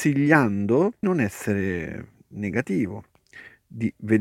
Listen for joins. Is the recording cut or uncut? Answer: cut